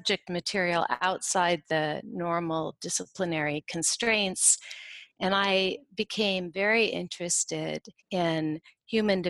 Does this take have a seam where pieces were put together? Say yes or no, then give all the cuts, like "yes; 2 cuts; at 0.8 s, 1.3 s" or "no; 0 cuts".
yes; 1 cut; at 8.0 s